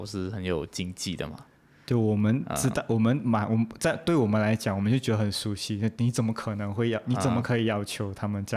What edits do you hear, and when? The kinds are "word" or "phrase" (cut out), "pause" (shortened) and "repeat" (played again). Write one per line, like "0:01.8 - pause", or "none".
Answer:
none